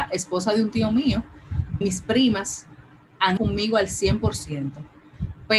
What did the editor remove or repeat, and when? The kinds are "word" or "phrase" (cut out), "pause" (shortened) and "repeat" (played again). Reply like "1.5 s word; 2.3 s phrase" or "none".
1.8 s word; 3.4 s word